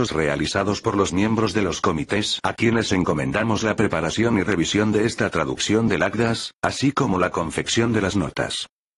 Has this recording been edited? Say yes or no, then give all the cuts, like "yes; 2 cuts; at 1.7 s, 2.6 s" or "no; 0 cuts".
no; 0 cuts